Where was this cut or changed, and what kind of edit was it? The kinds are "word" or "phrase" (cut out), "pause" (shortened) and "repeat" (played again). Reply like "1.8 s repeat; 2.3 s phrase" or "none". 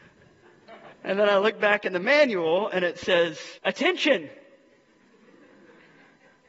0.9 s pause; 3.6 s pause